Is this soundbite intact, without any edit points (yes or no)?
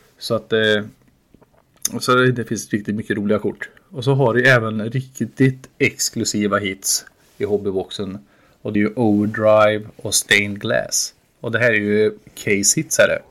no